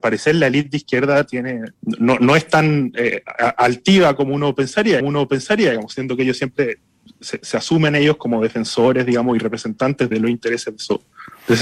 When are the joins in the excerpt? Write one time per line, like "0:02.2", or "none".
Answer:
0:01.7
0:05.0
0:10.1